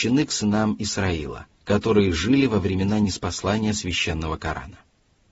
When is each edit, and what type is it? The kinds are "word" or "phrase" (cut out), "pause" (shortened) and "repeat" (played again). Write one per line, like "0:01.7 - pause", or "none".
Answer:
0:01.5 - pause